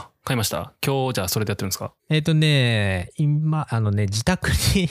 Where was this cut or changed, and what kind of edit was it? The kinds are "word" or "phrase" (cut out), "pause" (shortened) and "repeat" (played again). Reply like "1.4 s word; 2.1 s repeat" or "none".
2.0 s pause